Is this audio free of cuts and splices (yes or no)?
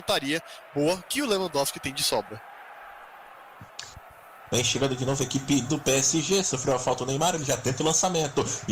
yes